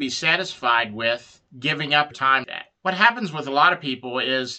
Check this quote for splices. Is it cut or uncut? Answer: cut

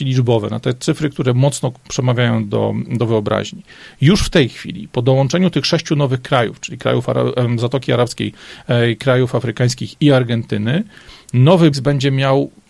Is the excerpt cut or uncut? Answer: cut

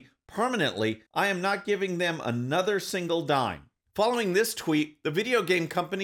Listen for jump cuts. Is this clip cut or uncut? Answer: cut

